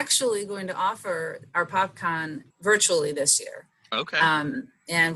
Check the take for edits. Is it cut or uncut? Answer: cut